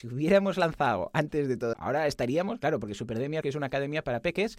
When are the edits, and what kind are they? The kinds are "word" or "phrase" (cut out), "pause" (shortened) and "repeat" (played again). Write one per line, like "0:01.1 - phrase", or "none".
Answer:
0:01.7 - word
0:03.4 - word

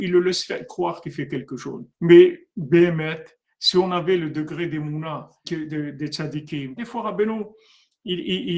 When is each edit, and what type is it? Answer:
0:01.9 - pause
0:05.4 - word
0:06.8 - word

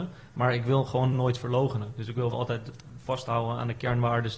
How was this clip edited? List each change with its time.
0:01.1 - word
0:02.3 - word

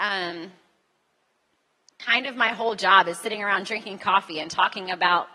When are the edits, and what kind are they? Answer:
none

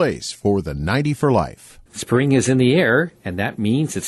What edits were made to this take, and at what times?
0:01.9 - pause

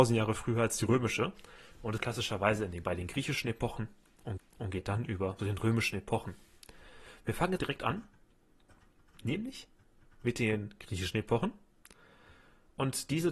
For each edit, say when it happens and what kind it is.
0:02.0 - phrase
0:04.4 - repeat
0:05.4 - word
0:07.6 - word

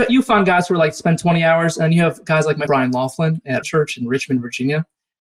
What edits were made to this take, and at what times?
0:02.7 - word
0:03.6 - word

